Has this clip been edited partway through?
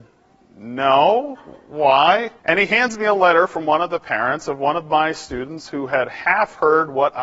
yes; 1 cut; at 2.4 s

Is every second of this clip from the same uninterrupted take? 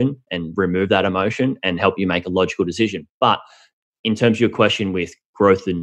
yes; 0 cuts

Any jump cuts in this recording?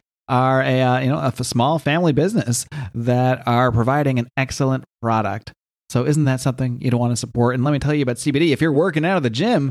no; 0 cuts

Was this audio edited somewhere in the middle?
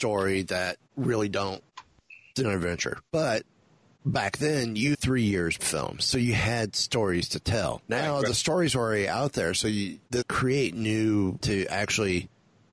yes; 7 cuts; at 2.4 s, 3.6 s, 4.9 s, 5.6 s, 7.8 s, 10.2 s, 11.4 s

